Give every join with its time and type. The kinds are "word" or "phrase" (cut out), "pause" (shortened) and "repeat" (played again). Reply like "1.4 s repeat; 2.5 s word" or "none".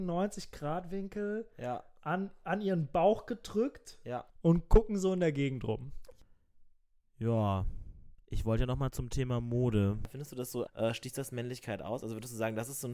4.3 s pause; 8.2 s pause; 10.7 s phrase